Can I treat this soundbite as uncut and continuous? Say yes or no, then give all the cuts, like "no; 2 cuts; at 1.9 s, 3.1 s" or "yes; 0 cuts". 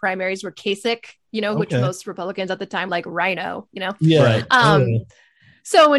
no; 1 cut; at 2.9 s